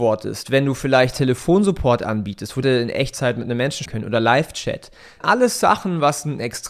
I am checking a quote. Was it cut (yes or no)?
yes